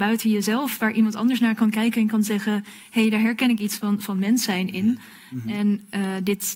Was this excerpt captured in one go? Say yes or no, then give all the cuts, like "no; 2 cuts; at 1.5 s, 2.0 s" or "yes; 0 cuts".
yes; 0 cuts